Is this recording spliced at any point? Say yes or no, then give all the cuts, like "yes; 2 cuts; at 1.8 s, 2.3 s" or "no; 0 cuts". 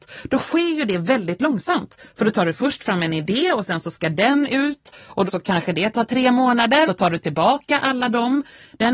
yes; 2 cuts; at 5.3 s, 6.9 s